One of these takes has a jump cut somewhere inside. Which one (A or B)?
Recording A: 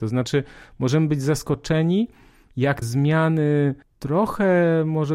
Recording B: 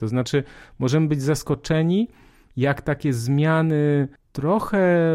A